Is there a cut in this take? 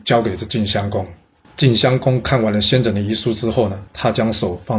yes; 2 cuts; at 1.4 s, 3.9 s

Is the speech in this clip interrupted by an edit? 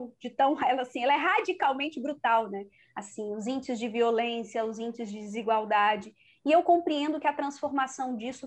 no; 0 cuts

